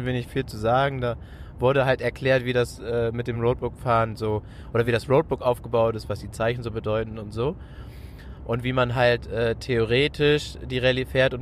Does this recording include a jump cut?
no; 0 cuts

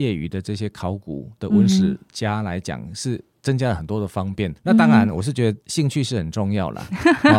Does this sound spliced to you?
yes; 2 cuts; at 4.6 s, 5.6 s

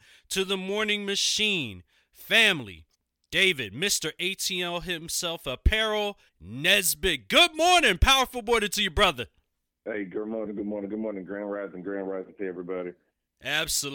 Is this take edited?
yes; 3 cuts; at 2.9 s, 6.3 s, 9.7 s

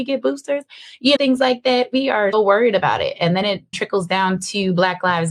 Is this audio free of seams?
no; 3 cuts; at 1.2 s, 2.3 s, 3.7 s

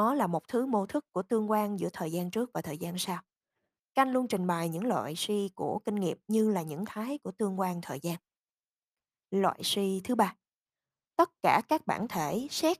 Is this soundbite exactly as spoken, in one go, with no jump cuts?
no; 1 cut; at 6.9 s

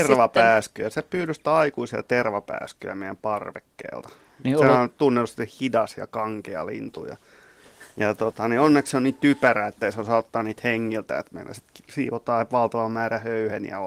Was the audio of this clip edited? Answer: no; 0 cuts

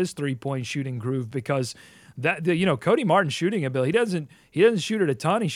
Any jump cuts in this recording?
no; 0 cuts

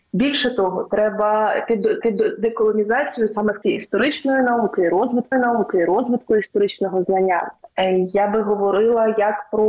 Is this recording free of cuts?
no; 3 cuts; at 2.0 s, 3.6 s, 5.3 s

